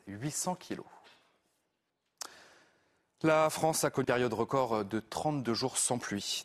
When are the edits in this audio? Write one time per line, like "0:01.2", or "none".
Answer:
0:04.0